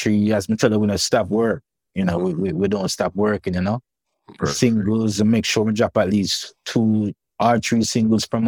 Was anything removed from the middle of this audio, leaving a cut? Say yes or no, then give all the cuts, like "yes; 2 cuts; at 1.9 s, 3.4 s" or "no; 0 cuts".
no; 0 cuts